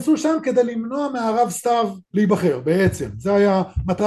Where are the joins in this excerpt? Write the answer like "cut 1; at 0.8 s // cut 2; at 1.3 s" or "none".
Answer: cut 1; at 2.0 s